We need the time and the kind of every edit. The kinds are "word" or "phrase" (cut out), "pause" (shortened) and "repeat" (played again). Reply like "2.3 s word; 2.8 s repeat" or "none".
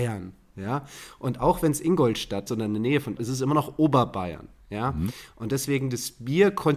2.5 s word; 3.2 s word